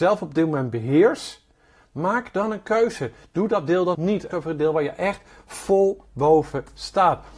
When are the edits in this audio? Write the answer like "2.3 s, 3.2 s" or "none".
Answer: 3.9 s, 4.3 s